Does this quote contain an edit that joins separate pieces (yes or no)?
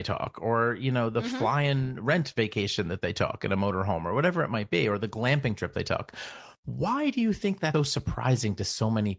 yes